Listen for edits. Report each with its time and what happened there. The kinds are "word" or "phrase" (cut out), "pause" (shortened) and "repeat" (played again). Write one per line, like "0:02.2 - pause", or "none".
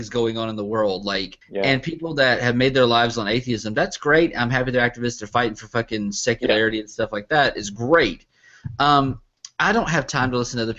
0:01.4 - pause